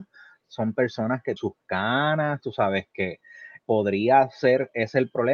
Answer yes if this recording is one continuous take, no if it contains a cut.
no